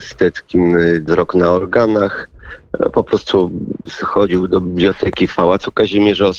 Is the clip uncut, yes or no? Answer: no